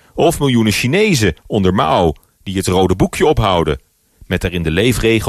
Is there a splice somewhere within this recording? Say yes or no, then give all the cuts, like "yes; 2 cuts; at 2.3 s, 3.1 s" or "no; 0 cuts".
no; 0 cuts